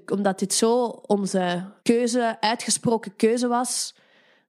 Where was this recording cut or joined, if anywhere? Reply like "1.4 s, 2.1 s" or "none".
1.8 s